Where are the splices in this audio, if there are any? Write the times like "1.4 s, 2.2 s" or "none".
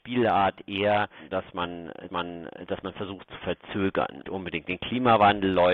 2.1 s, 4.2 s